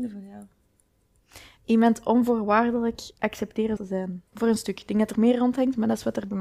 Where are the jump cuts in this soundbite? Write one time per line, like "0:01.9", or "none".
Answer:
0:03.8
0:04.3
0:05.1